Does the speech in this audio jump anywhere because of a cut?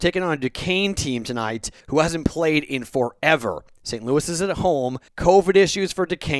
yes; 2 cuts; at 1.8 s, 5.1 s

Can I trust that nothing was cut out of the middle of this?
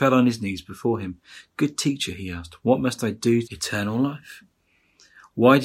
no; 1 cut; at 3.4 s

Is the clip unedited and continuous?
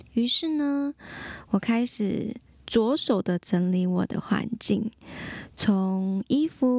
yes; 0 cuts

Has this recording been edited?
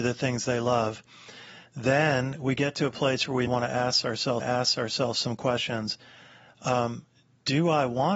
yes; 2 cuts; at 3.5 s, 4.4 s

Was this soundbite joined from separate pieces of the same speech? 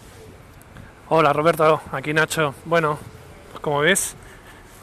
yes; 1 cut; at 2.6 s

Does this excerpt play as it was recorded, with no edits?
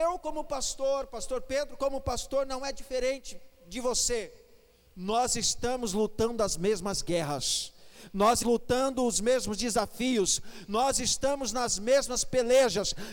no; 1 cut; at 8.4 s

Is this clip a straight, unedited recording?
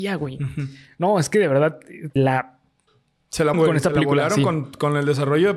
no; 2 cuts; at 2.2 s, 3.5 s

